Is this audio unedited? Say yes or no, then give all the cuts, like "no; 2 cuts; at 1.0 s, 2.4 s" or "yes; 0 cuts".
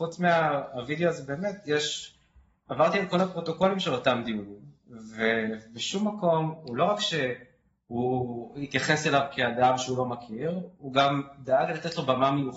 yes; 0 cuts